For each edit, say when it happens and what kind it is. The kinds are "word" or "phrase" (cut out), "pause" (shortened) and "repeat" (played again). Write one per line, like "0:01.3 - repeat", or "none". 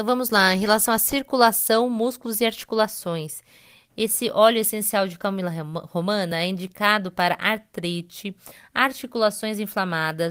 none